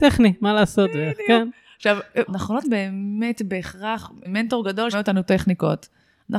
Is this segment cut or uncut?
cut